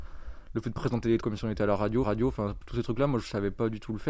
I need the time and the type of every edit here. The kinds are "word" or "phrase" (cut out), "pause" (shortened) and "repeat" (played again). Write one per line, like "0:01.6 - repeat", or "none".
0:01.2 - word
0:02.0 - repeat